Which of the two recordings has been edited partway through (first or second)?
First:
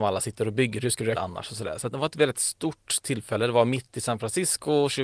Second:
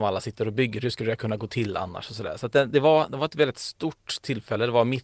first